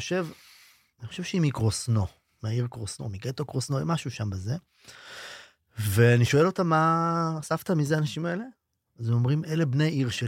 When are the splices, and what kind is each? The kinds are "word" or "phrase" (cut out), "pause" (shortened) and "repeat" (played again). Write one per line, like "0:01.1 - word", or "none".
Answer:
none